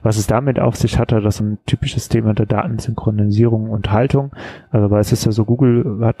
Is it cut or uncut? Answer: cut